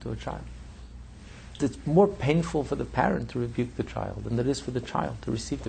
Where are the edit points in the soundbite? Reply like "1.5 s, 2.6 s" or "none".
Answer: 1.6 s